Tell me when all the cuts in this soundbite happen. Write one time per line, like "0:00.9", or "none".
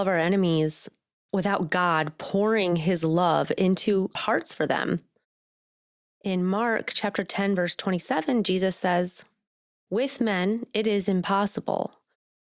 0:04.2

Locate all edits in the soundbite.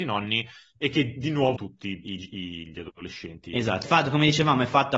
0:01.5
0:03.8

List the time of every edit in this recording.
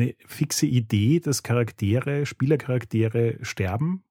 none

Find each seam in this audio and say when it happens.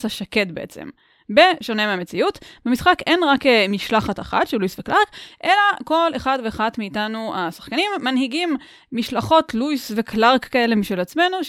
none

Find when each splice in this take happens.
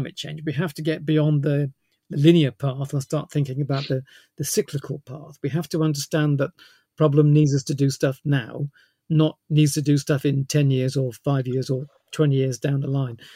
none

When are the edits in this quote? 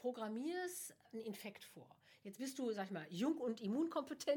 none

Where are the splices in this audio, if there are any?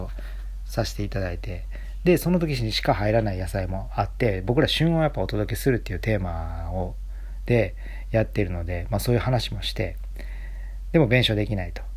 none

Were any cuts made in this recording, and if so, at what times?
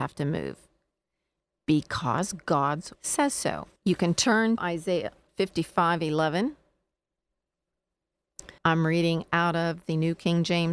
0:02.9
0:03.8
0:04.6
0:08.6

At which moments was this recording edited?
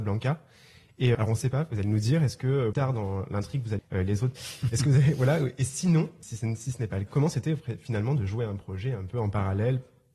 0:01.1
0:02.7
0:03.8
0:04.4
0:06.2
0:07.1

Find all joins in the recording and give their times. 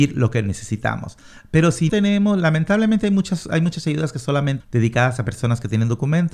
0:01.9
0:04.6

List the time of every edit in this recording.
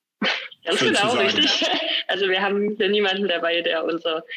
none

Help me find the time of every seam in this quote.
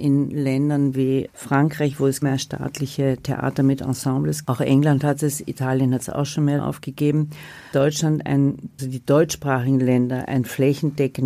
0:01.3
0:02.2
0:04.4
0:06.6
0:07.7
0:08.8

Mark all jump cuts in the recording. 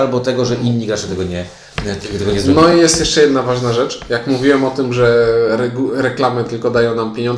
none

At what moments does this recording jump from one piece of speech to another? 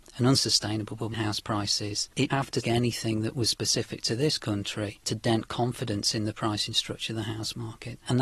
0:01.1
0:02.3
0:02.6

